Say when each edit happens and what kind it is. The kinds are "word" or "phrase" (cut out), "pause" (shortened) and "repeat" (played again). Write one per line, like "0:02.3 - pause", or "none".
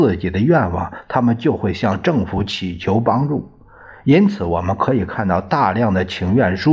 none